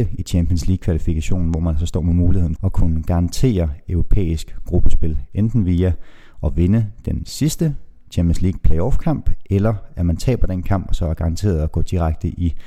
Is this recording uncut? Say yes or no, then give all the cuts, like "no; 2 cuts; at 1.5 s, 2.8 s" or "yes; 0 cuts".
no; 1 cut; at 2.6 s